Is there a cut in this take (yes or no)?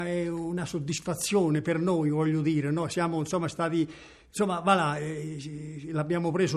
no